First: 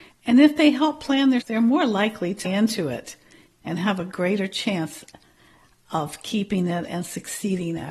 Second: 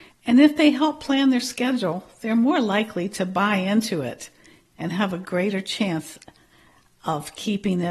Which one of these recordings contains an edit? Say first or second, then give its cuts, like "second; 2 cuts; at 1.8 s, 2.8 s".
first; 2 cuts; at 1.4 s, 2.4 s